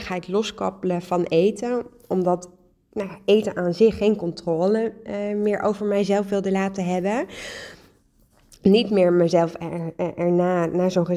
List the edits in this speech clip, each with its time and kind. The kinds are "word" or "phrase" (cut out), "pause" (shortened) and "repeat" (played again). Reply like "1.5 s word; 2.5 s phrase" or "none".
none